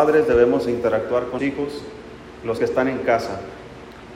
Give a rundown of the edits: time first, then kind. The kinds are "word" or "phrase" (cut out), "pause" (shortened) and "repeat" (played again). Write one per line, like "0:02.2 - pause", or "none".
0:01.4 - word
0:02.6 - word

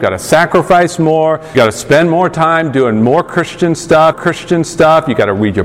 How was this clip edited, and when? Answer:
0:01.5 - word
0:04.1 - repeat

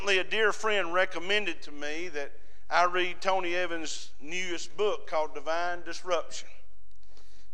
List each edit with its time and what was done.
none

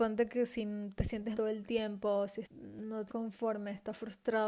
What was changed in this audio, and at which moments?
0:01.3 - word
0:02.4 - word
0:03.1 - word

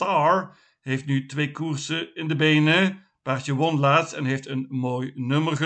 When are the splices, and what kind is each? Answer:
none

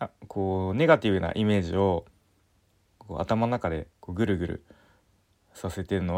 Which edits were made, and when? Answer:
0:03.9 - pause

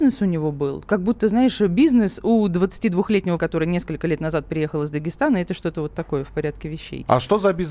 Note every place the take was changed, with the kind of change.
0:03.4 - word

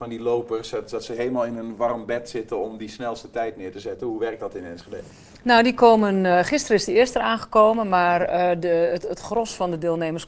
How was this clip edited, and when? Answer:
none

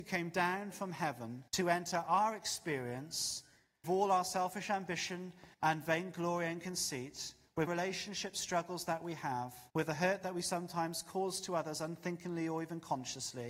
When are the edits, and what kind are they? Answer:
0:01.5 - pause
0:03.8 - word
0:05.5 - pause
0:07.7 - phrase
0:09.7 - pause

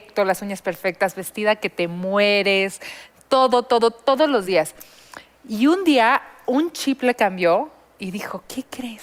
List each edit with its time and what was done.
none

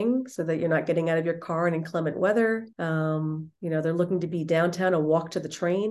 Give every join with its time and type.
0:02.7 - pause

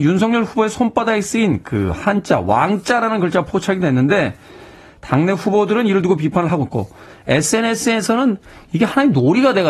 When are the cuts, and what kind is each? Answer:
none

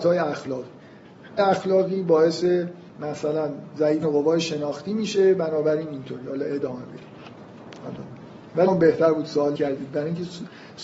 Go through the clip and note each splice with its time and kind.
0:01.4 - word
0:02.9 - pause
0:04.0 - word
0:08.7 - word
0:09.6 - word

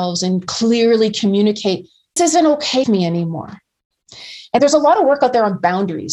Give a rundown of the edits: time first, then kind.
0:02.2 - word
0:02.8 - word
0:04.6 - word

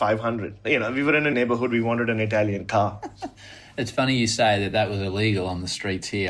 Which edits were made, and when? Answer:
0:01.3 - word

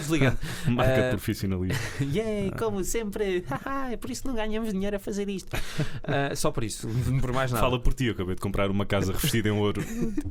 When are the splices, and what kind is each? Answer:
none

